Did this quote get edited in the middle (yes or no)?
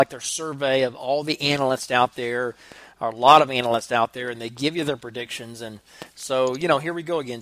no